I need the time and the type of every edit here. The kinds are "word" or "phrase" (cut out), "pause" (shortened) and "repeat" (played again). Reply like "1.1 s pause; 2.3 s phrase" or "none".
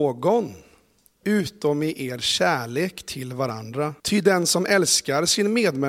4.0 s pause

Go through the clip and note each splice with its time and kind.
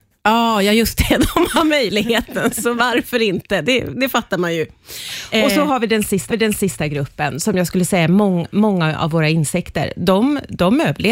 6.3 s repeat

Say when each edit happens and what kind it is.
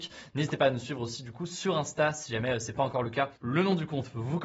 3.4 s pause

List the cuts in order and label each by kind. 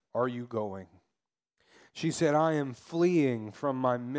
none

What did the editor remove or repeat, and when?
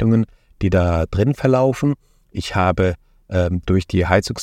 none

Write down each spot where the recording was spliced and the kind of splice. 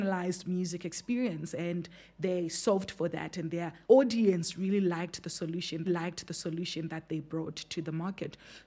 3.8 s pause; 5.9 s repeat

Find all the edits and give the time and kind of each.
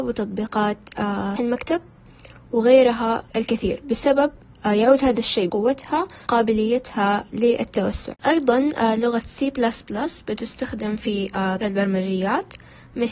1.4 s word; 3.3 s pause; 5.5 s word; 6.3 s word; 11.6 s word

